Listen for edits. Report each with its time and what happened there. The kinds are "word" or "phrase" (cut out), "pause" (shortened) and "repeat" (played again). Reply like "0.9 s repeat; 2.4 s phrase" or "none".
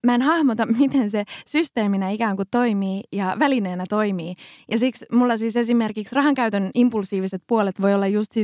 none